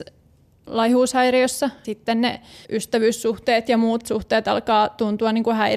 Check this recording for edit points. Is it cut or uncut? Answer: cut